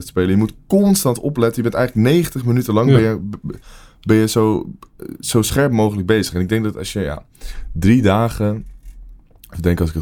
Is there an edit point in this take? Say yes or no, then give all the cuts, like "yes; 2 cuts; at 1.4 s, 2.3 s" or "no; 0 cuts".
no; 0 cuts